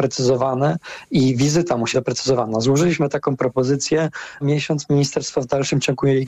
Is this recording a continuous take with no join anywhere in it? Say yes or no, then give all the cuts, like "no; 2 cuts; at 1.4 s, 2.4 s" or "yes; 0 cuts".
no; 2 cuts; at 1.9 s, 4.4 s